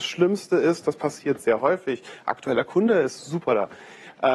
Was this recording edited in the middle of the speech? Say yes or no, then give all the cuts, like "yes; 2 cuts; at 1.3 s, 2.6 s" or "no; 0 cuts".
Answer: no; 0 cuts